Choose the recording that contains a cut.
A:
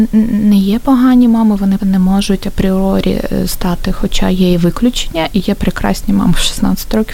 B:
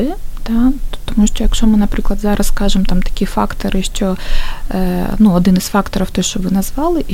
A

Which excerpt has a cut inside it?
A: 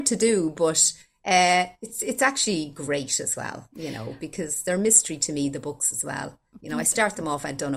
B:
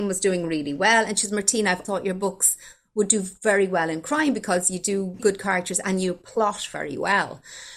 B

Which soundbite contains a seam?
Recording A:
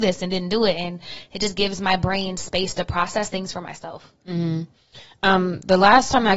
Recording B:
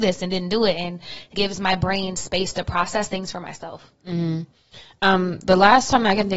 B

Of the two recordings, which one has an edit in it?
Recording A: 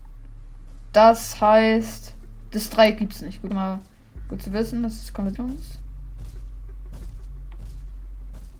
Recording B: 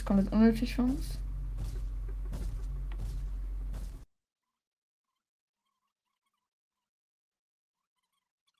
A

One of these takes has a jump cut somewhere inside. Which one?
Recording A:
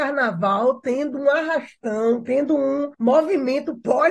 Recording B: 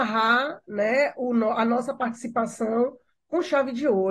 A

